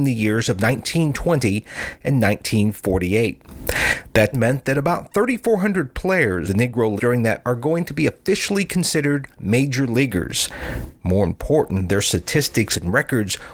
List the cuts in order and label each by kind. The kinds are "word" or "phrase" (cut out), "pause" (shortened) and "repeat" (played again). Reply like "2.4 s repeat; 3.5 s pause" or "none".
4.3 s word; 6.5 s word; 7.0 s word; 7.4 s word

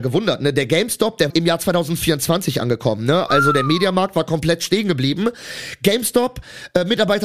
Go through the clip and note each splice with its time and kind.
1.3 s word

